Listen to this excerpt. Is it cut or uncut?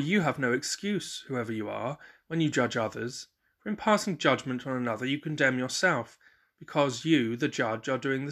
uncut